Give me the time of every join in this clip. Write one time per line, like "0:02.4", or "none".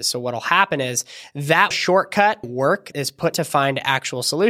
0:01.7
0:02.4
0:02.9
0:03.3